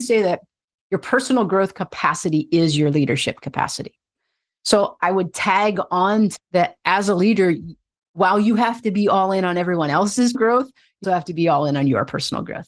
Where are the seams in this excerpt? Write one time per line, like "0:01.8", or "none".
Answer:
0:05.0
0:06.4
0:10.3
0:11.0